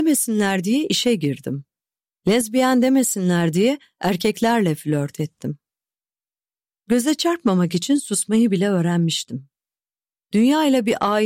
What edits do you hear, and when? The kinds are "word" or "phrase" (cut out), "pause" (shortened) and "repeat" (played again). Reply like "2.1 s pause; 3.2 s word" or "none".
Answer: none